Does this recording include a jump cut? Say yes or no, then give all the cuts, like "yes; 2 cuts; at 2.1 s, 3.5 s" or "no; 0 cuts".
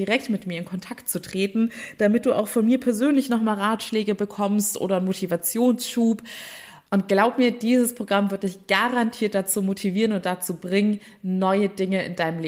yes; 1 cut; at 6.8 s